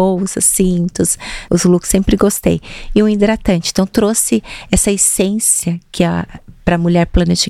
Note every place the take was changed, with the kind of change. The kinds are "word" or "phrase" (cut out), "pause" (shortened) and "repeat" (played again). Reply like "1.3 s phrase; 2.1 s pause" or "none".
1.5 s word